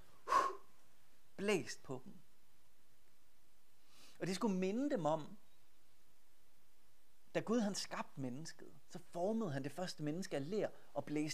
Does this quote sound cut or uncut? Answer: uncut